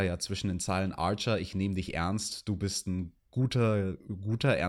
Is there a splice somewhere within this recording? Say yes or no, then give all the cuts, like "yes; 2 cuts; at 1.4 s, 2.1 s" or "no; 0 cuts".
yes; 1 cut; at 3.2 s